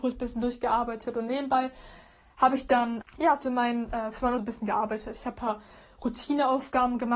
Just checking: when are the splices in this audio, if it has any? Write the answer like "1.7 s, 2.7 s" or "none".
3.0 s, 4.4 s